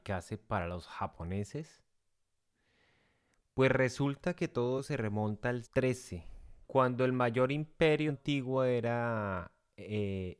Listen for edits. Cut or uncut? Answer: cut